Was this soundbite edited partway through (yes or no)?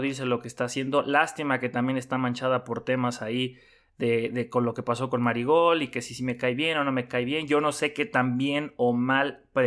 no